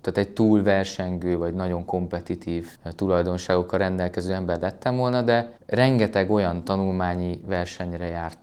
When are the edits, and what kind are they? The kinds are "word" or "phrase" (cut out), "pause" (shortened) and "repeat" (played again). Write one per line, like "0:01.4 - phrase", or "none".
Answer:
0:02.7 - pause
0:05.6 - pause